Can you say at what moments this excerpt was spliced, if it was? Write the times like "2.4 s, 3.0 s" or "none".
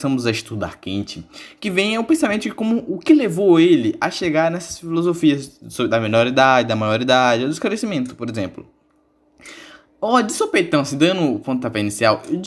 none